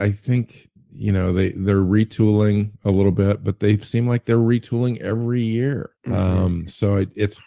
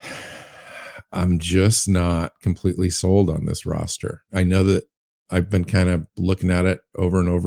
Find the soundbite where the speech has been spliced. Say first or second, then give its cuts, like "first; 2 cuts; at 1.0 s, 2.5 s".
first; 1 cut; at 6.0 s